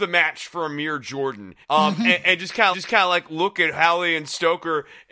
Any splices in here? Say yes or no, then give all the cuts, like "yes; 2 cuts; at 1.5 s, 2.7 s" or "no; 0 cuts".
yes; 2 cuts; at 1.6 s, 2.7 s